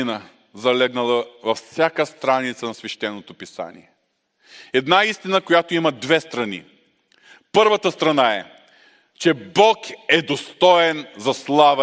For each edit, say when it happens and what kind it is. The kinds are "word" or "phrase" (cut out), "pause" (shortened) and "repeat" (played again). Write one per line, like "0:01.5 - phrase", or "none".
none

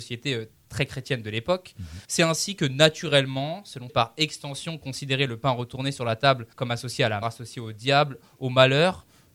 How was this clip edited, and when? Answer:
0:02.0 - pause
0:03.9 - phrase
0:06.5 - pause
0:07.2 - word

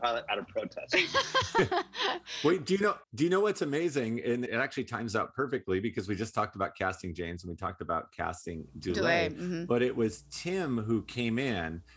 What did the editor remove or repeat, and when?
0:03.0 - pause
0:04.5 - phrase

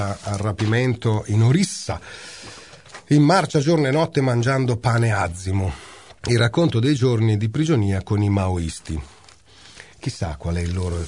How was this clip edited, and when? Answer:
0:06.2 - pause
0:09.9 - pause

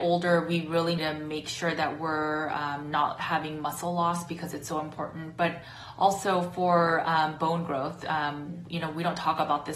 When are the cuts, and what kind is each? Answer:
0:01.0 - word

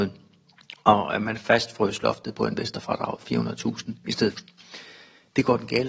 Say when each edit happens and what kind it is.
0:04.3 - word

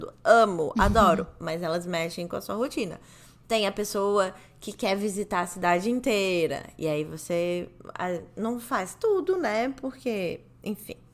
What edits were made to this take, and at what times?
none

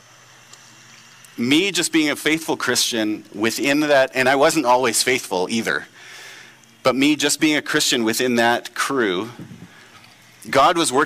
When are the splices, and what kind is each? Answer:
none

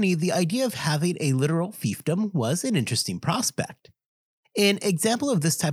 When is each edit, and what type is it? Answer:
none

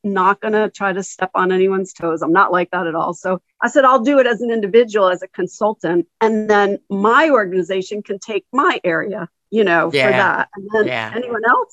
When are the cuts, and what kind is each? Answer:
none

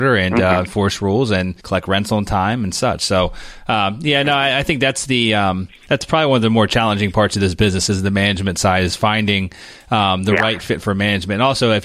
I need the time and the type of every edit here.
0:01.6 - pause

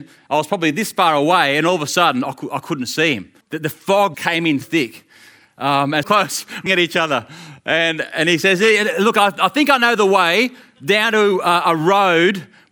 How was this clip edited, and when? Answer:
0:03.4 - pause
0:04.1 - word
0:04.6 - word
0:06.0 - phrase
0:06.7 - word

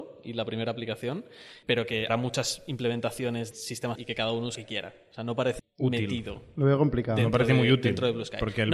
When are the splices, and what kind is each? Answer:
0:01.6 - word
0:02.1 - word
0:03.5 - word
0:04.0 - word
0:04.6 - word
0:05.6 - word

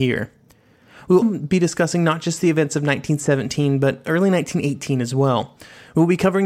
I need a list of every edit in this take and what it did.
0:01.2 - word

